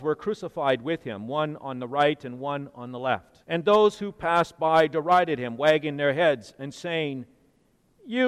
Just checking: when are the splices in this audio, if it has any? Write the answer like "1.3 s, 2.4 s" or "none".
3.4 s

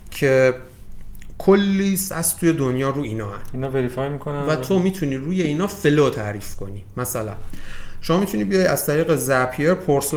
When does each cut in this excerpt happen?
none

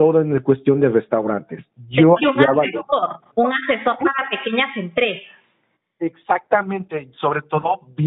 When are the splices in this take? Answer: 2.2 s

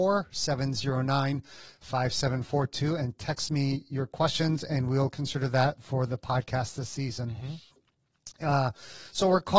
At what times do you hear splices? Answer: none

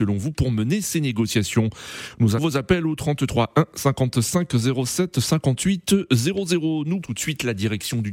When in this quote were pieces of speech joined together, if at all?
2.4 s, 7.0 s

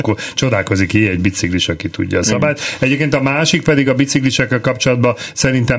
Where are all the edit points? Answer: none

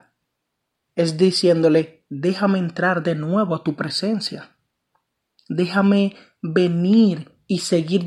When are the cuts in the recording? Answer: none

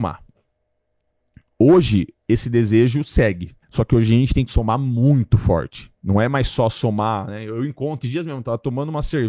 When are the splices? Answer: 3.6 s, 4.5 s, 8.0 s

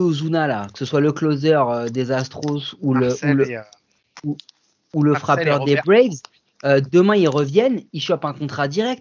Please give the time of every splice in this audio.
none

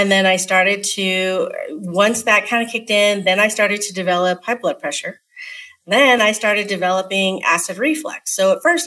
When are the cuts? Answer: none

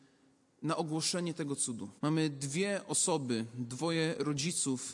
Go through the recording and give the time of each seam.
2.0 s

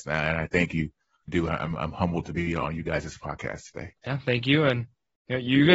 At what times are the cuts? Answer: 1.3 s, 4.0 s

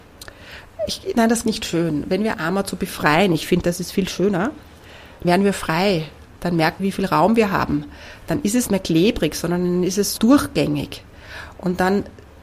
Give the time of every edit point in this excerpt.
1.4 s, 2.3 s, 5.2 s, 6.8 s, 8.7 s, 10.2 s

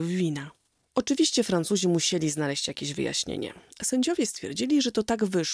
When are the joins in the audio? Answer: none

